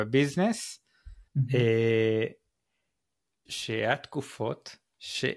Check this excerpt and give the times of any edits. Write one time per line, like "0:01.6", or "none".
0:01.3
0:03.5